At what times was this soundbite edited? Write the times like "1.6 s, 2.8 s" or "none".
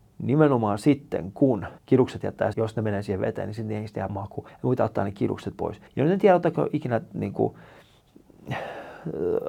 1.8 s, 2.5 s, 4.1 s, 4.5 s, 5.9 s